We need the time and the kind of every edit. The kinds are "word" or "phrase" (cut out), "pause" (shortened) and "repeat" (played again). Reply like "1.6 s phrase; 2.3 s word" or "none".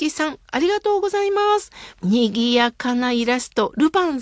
1.9 s pause